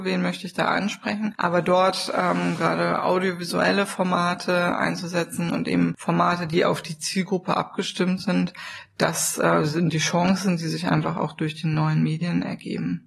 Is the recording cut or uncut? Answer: uncut